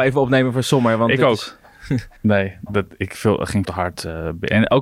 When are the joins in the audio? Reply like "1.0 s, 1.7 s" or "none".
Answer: 2.2 s, 3.1 s, 3.6 s